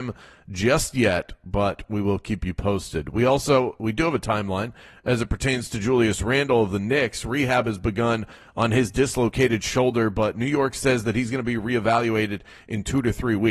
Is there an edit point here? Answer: no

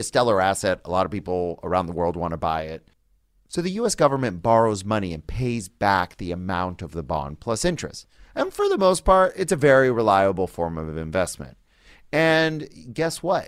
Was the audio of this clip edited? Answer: no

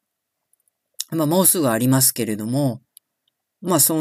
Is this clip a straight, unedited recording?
yes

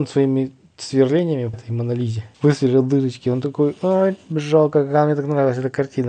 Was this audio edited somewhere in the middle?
yes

